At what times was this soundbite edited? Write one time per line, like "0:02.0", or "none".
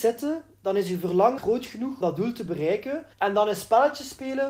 0:01.4
0:02.0
0:03.1